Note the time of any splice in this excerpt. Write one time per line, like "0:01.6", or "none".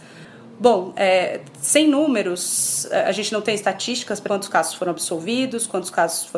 0:04.3